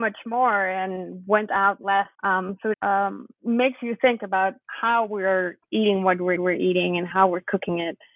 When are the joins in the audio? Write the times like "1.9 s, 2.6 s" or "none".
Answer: 2.1 s, 2.7 s, 4.6 s, 6.4 s